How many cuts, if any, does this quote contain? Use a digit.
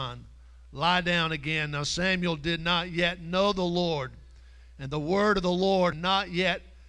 1